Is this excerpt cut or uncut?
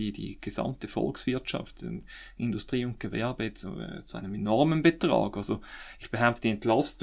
uncut